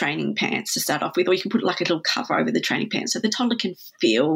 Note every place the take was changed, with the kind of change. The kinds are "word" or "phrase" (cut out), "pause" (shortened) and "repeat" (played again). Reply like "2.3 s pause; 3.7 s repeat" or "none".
none